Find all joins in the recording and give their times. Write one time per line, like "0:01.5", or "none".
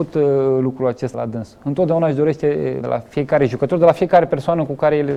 0:01.1
0:02.8